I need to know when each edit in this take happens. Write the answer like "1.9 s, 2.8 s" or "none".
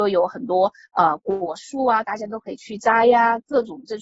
2.0 s